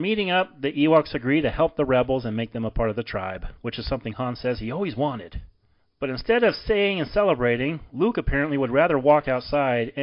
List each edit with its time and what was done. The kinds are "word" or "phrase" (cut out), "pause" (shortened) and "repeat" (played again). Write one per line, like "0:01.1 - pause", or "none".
none